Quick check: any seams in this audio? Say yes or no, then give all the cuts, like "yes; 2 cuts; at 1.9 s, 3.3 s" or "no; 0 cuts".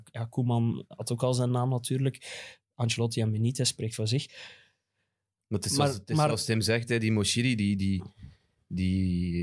no; 0 cuts